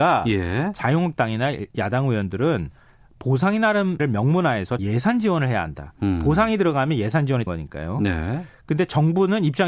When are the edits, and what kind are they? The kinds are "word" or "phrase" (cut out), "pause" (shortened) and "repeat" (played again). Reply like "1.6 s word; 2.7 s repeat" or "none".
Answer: 4.0 s word; 4.8 s word; 7.5 s word